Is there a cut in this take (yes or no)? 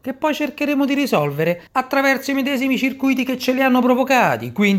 yes